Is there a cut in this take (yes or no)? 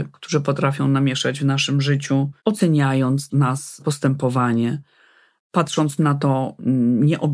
yes